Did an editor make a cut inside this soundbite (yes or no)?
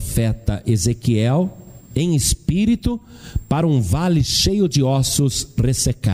no